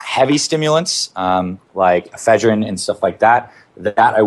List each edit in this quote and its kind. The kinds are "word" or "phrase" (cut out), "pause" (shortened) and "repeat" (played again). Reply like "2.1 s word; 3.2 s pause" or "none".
none